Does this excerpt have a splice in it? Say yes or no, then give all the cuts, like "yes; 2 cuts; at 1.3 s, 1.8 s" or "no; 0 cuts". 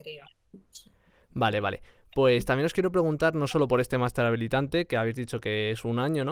no; 0 cuts